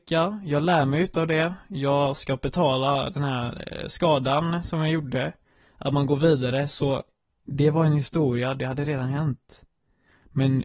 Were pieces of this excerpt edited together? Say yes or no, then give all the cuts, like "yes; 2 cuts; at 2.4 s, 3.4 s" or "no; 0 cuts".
no; 0 cuts